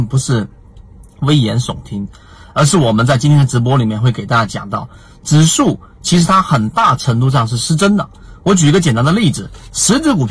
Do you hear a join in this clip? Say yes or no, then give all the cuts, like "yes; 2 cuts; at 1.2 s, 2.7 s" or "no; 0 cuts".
no; 0 cuts